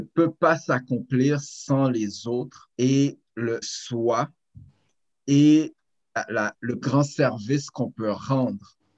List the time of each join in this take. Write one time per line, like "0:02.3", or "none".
0:02.7
0:03.6
0:06.8

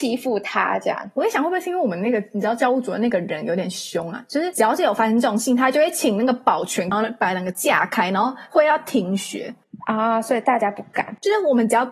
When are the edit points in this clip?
none

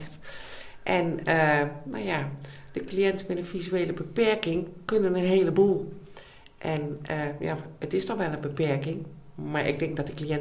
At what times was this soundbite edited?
none

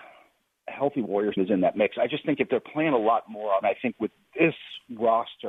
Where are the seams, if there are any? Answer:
0:01.4
0:03.6

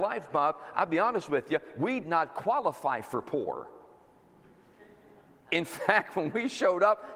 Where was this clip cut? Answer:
0:02.0

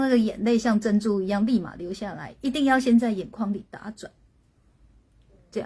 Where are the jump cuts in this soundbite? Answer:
none

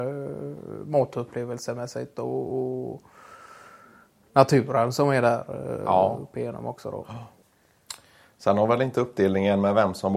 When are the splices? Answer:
none

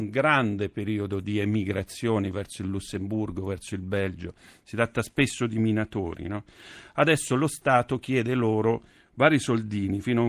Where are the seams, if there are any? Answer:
none

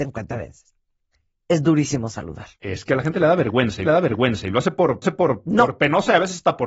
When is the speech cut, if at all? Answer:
0:01.1
0:02.5
0:03.8
0:05.0

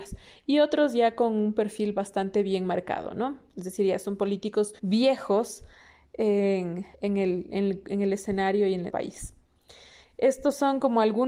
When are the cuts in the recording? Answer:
0:04.8
0:06.9
0:08.9

